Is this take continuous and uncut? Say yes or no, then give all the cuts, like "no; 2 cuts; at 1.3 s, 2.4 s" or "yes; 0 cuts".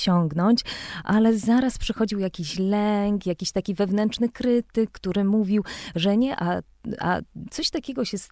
yes; 0 cuts